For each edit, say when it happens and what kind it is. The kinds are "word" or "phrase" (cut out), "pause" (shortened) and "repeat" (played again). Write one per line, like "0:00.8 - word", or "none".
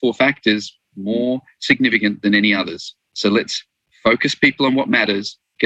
none

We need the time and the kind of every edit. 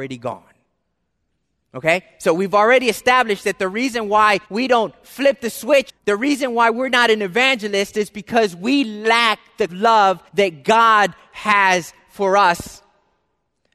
0:04.4 - pause
0:05.9 - word
0:09.7 - phrase
0:10.3 - pause

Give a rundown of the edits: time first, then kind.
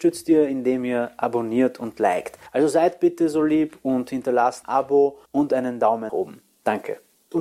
0:02.5 - pause
0:04.6 - word
0:05.3 - pause
0:06.1 - word

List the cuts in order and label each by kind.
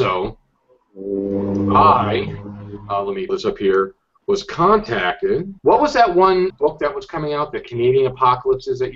0:03.3 - word
0:05.6 - pause
0:06.5 - word

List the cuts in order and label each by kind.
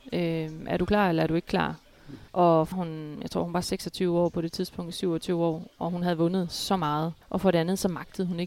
0:02.3 - pause
0:02.7 - phrase
0:07.2 - pause

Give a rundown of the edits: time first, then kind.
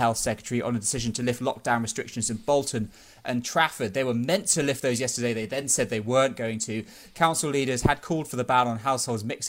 none

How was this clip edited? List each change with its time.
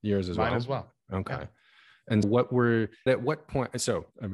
0:02.2 - word
0:03.1 - word

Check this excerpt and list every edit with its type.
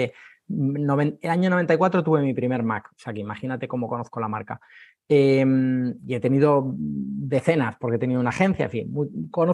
none

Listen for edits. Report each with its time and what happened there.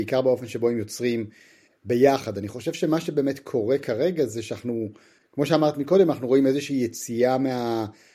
none

